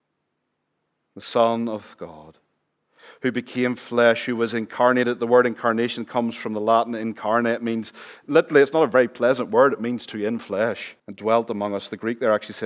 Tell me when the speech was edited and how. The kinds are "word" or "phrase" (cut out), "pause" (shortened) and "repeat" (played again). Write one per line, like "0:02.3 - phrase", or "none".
0:11.0 - pause

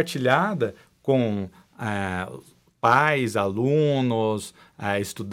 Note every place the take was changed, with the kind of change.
none

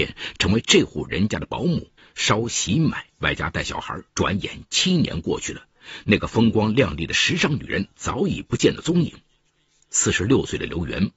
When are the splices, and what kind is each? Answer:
0:02.0 - pause
0:03.1 - pause
0:04.1 - pause

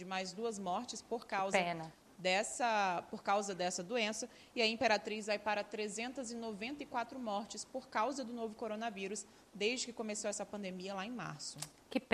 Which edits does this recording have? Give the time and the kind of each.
none

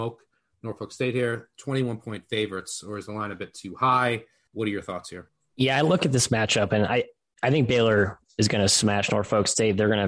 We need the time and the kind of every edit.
none

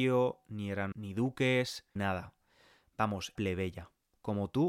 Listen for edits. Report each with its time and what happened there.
0:00.9 - word
0:02.0 - word
0:03.4 - word

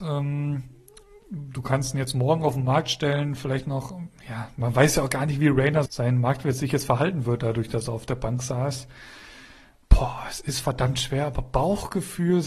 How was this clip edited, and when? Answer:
0:05.9 - word

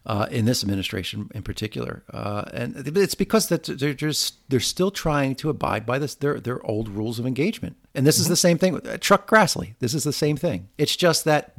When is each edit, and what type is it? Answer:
0:07.9 - pause

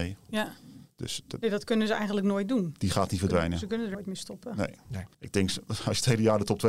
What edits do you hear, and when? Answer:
0:00.9 - pause
0:03.9 - word
0:05.1 - pause

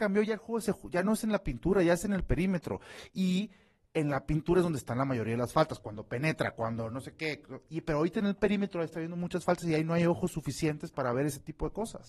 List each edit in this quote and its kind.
none

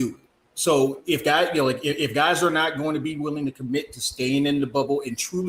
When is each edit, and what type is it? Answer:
none

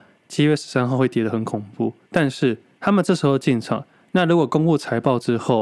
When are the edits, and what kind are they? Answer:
0:02.0 - pause

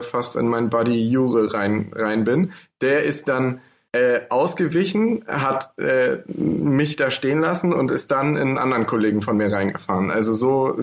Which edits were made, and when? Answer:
none

